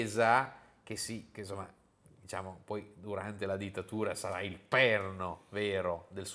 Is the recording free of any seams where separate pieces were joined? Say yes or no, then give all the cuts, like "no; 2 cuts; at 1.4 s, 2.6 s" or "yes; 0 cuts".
yes; 0 cuts